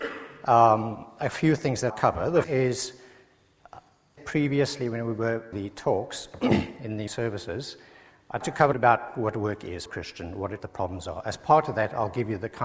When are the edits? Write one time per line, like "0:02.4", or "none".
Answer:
0:01.9
0:02.4
0:04.2
0:05.5
0:07.1
0:08.4
0:08.7
0:09.9
0:10.6